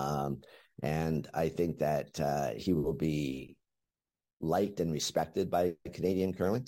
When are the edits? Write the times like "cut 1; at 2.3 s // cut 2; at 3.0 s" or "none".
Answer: cut 1; at 4.2 s